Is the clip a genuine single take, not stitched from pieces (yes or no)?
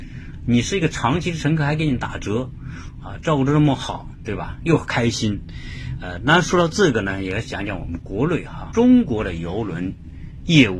no